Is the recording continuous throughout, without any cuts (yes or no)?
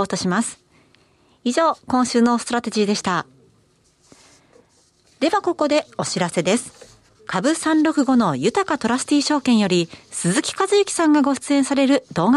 yes